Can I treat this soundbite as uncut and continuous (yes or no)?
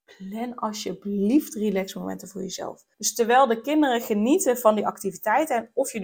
no